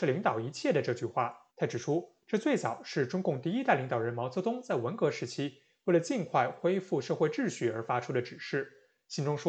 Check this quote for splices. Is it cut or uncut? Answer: cut